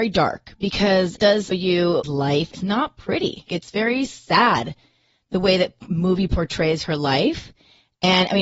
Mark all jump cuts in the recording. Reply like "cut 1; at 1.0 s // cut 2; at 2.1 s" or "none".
cut 1; at 1.2 s // cut 2; at 1.5 s // cut 3; at 2.0 s // cut 4; at 2.5 s // cut 5; at 3.5 s